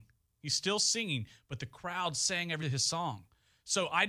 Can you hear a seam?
yes; 1 cut; at 2.6 s

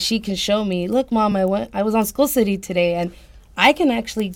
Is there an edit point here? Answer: no; 0 cuts

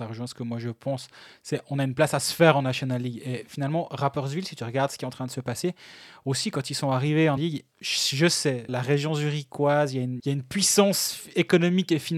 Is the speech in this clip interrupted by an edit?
yes; 4 cuts; at 7.4 s, 7.7 s, 8.7 s, 10.2 s

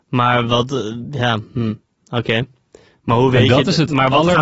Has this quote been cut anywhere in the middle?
no; 0 cuts

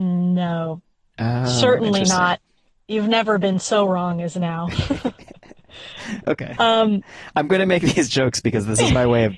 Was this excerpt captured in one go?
yes; 0 cuts

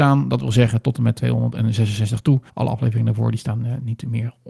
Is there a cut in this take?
yes; 1 cut; at 2.5 s

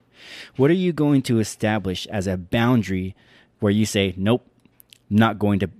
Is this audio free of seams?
yes; 0 cuts

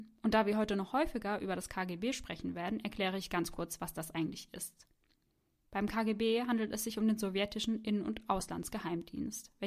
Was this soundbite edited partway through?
no; 0 cuts

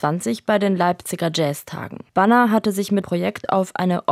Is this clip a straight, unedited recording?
no; 2 cuts; at 2.1 s, 3.0 s

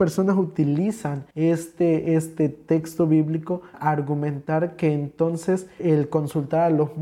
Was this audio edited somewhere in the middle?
yes; 3 cuts; at 1.3 s, 3.7 s, 5.8 s

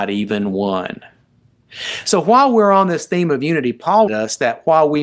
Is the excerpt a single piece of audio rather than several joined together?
no; 1 cut; at 4.1 s

